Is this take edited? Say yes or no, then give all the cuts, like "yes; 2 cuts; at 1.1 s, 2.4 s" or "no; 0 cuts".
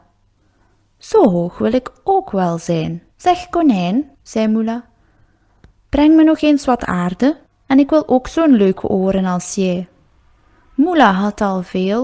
yes; 3 cuts; at 3.1 s, 4.1 s, 7.5 s